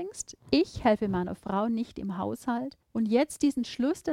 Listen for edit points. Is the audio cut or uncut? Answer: cut